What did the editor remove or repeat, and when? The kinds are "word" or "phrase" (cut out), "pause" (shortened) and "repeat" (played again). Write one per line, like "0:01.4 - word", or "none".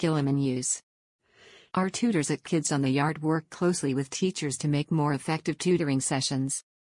none